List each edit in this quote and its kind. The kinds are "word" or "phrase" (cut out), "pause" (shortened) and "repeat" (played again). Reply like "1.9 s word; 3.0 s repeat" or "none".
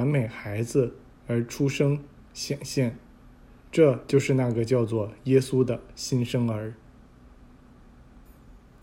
none